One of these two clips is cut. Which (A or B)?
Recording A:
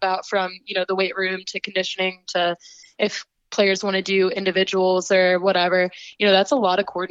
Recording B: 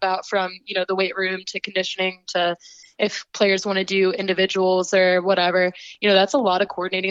B